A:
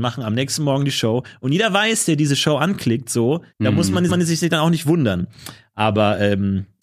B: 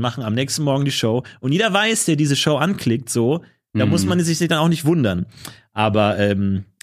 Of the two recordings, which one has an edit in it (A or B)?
A